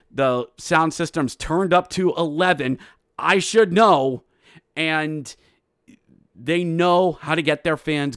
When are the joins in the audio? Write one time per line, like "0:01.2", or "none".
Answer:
none